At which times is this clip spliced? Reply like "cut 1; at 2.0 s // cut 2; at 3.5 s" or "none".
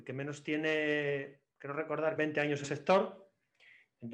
cut 1; at 1.5 s // cut 2; at 2.2 s // cut 3; at 2.6 s